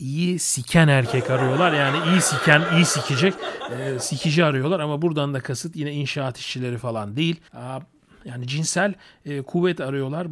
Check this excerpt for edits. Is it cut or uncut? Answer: cut